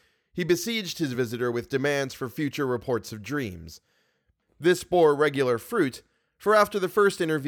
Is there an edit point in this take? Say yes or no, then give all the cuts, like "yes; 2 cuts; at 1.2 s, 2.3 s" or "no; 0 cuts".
no; 0 cuts